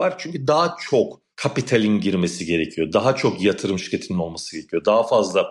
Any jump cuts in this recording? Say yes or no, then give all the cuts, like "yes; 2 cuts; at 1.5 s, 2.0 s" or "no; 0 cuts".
yes; 1 cut; at 1.3 s